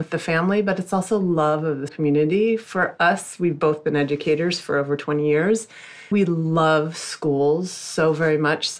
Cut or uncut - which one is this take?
cut